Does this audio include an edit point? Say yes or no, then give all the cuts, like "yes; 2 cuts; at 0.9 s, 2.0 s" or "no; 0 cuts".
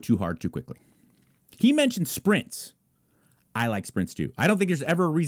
no; 0 cuts